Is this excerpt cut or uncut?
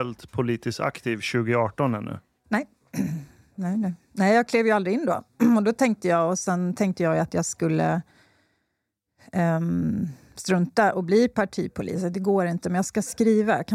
uncut